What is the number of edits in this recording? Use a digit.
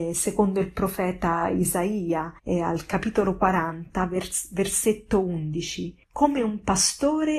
2